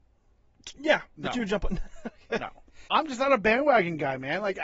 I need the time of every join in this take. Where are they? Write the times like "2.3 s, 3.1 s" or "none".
2.9 s